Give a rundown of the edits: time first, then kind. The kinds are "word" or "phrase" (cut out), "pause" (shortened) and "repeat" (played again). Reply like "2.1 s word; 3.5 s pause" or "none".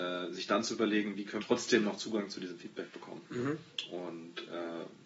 1.4 s phrase